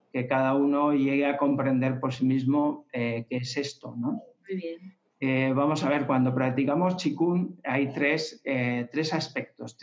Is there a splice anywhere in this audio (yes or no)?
no